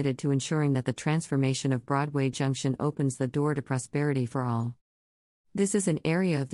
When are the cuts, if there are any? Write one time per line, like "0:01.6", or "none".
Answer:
none